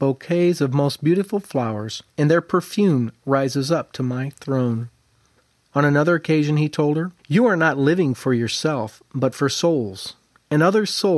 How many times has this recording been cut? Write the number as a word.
two